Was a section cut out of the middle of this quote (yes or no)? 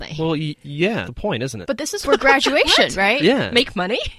yes